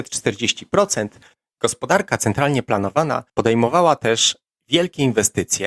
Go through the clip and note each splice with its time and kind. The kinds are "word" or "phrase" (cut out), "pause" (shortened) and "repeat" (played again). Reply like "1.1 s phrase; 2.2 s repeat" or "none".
3.3 s pause